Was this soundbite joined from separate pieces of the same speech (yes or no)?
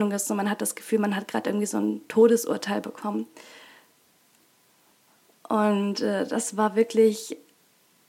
no